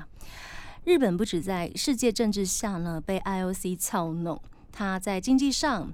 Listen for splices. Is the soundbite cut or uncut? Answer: uncut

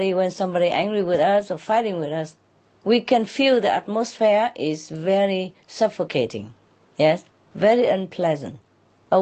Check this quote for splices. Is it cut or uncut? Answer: uncut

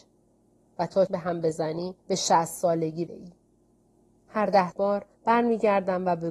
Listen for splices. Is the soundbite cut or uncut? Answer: cut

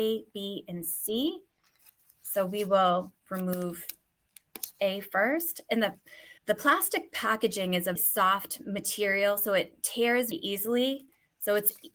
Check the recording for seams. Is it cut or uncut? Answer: cut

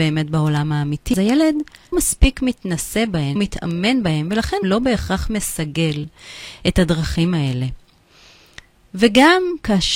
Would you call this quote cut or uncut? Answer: cut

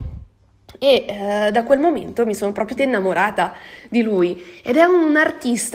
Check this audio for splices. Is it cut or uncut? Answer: cut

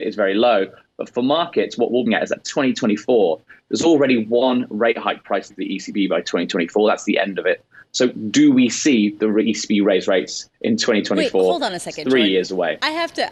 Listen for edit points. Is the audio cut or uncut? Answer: cut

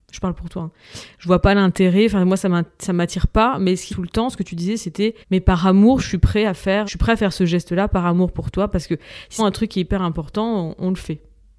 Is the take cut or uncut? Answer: cut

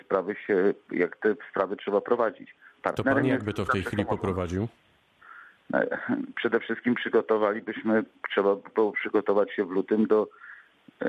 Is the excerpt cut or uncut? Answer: uncut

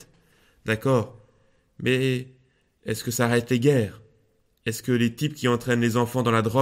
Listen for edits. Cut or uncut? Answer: uncut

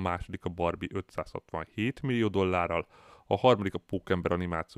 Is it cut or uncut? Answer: uncut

